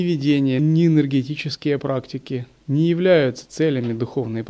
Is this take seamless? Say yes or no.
yes